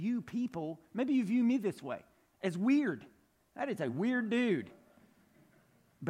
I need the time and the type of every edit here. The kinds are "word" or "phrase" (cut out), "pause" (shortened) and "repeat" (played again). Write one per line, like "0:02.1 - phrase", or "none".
none

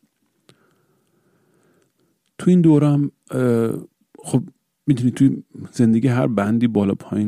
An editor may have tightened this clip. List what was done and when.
none

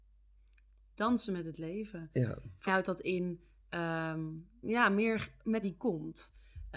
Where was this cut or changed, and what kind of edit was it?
0:02.7 - word
0:04.6 - word
0:05.6 - phrase

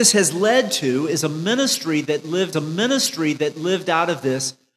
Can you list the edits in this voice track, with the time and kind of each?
0:02.5 - repeat

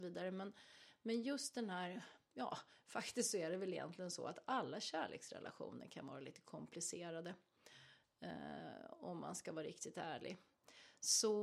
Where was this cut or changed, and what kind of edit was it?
none

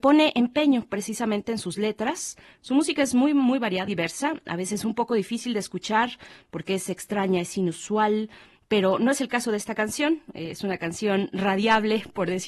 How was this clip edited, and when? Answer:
0:03.9 - word

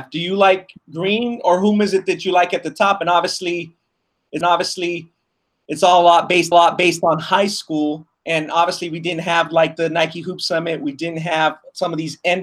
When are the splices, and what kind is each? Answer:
0:04.4 - repeat
0:06.5 - repeat
0:08.1 - pause

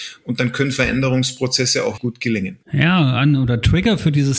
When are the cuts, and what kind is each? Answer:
0:02.0 - word
0:02.6 - pause

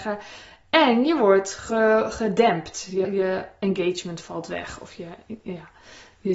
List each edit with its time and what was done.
0:03.0 - word

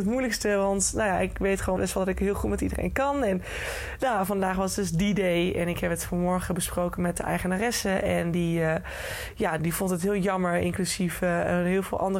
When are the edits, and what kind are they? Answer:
0:01.8 - word
0:09.6 - word

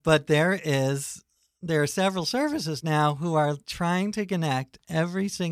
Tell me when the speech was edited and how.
none

